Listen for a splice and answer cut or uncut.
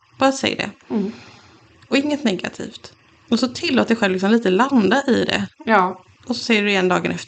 uncut